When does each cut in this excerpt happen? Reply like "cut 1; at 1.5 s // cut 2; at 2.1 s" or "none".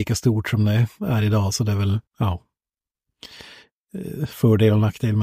cut 1; at 2.1 s

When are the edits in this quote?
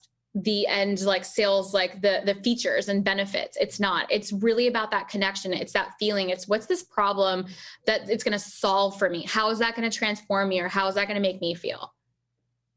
none

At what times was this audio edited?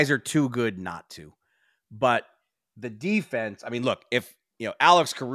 none

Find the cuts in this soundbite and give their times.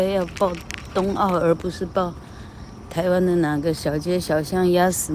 cut 1; at 2.9 s

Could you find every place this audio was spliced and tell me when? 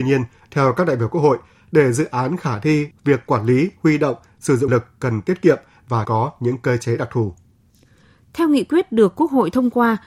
cut 1; at 2.9 s // cut 2; at 4.7 s // cut 3; at 6.0 s

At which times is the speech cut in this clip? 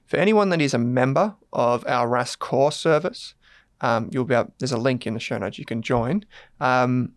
none

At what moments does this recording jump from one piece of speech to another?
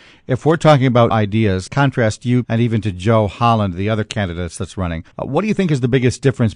cut 1; at 1.1 s // cut 2; at 1.7 s // cut 3; at 2.4 s // cut 4; at 5.1 s

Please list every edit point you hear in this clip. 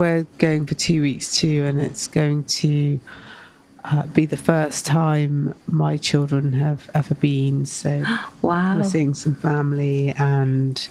none

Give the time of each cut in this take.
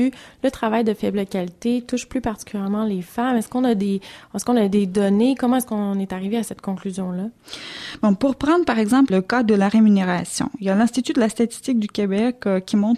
cut 1; at 9.1 s

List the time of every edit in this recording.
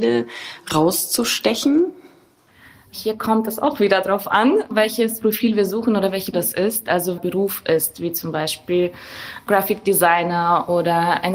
cut 1; at 6.3 s // cut 2; at 7.2 s

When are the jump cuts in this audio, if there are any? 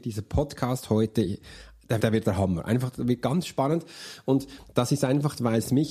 cut 1; at 2.0 s

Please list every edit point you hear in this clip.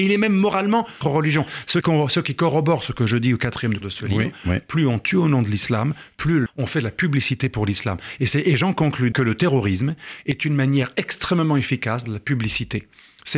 cut 1; at 1.0 s // cut 2; at 1.8 s // cut 3; at 3.8 s // cut 4; at 6.5 s // cut 5; at 9.1 s // cut 6; at 12.0 s

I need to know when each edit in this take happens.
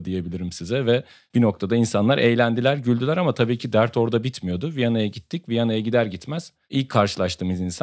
none

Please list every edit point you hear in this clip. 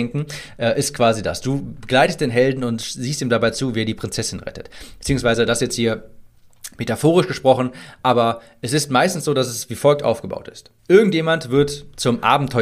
cut 1; at 10.8 s

